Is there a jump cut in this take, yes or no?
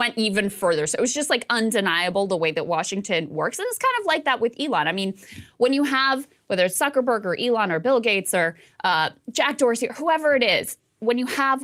no